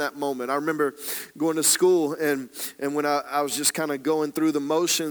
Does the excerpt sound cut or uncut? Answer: uncut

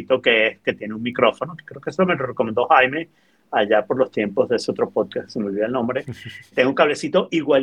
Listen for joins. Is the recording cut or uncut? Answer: cut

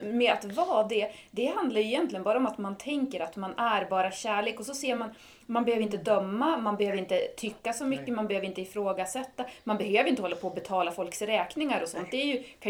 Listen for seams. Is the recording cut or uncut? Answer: uncut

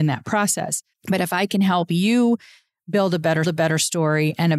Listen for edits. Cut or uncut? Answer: cut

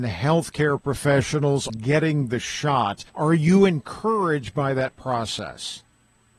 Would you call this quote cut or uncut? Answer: cut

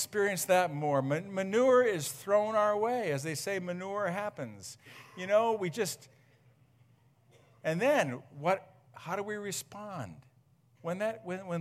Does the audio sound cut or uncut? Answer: uncut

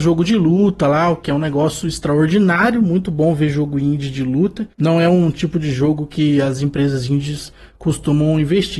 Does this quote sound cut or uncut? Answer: uncut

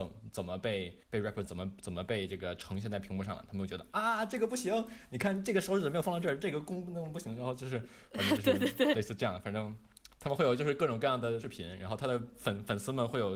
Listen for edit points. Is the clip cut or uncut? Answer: cut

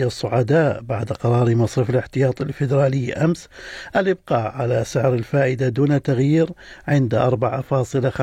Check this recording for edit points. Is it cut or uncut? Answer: uncut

